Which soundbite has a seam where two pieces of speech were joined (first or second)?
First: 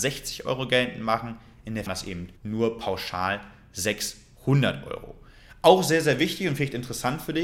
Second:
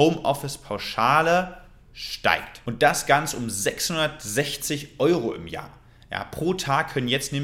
first